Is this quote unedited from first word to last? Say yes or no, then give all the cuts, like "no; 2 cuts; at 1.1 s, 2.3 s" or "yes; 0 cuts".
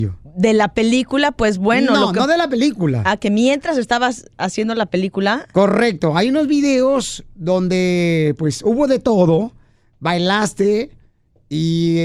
yes; 0 cuts